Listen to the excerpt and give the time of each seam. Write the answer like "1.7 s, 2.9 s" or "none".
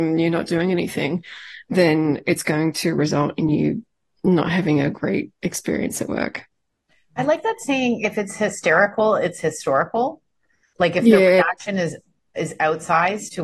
none